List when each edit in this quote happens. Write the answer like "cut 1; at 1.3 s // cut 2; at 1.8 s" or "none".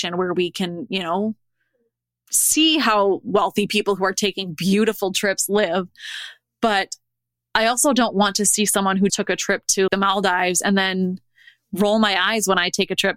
cut 1; at 9.1 s // cut 2; at 9.9 s